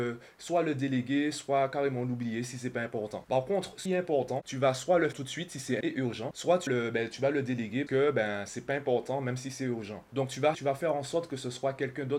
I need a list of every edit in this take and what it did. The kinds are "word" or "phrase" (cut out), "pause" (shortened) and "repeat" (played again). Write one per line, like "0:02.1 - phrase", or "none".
0:03.9 - word
0:05.1 - word
0:05.8 - word
0:06.7 - word
0:07.9 - word
0:10.5 - word